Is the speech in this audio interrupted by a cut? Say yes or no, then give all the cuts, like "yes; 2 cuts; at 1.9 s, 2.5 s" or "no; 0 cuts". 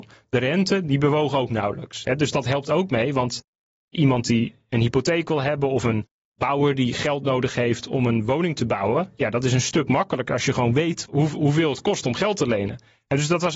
no; 0 cuts